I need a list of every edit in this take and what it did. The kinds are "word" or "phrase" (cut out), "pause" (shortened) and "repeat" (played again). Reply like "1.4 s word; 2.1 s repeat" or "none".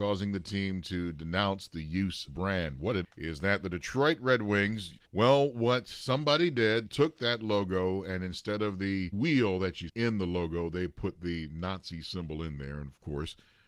2.3 s phrase; 3.0 s word; 5.0 s pause; 6.9 s word; 9.1 s word; 9.9 s word